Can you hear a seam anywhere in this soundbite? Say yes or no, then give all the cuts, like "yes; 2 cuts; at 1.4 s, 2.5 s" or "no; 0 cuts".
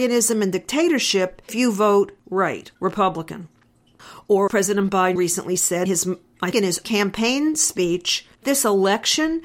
yes; 8 cuts; at 1.5 s, 2.7 s, 4.5 s, 5.2 s, 5.9 s, 6.5 s, 6.8 s, 8.4 s